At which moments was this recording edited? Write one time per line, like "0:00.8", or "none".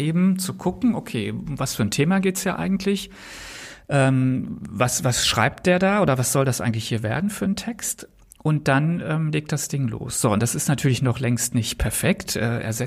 none